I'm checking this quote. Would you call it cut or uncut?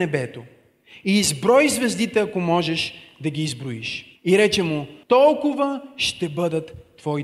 cut